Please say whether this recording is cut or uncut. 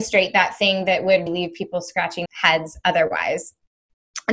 cut